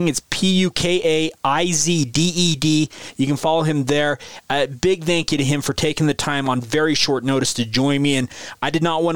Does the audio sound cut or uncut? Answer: uncut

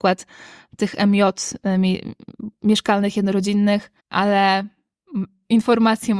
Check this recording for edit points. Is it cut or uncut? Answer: cut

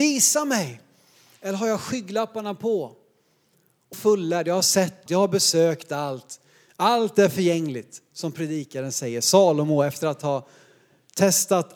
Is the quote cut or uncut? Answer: cut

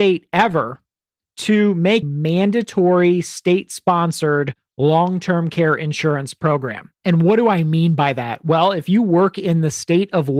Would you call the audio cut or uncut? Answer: cut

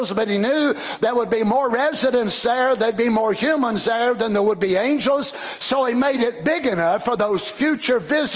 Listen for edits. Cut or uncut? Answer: uncut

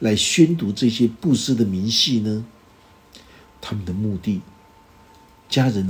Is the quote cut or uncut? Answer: uncut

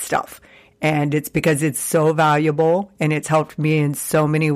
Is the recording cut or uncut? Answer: uncut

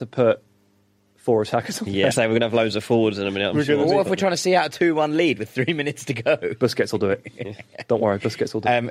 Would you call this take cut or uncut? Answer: cut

